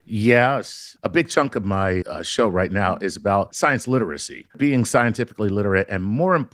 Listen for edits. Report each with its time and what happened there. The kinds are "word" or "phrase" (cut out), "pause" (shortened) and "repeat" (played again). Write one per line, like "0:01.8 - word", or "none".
0:02.0 - word
0:04.5 - pause